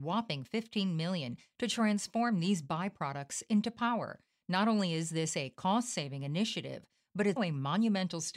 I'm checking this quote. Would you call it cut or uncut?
cut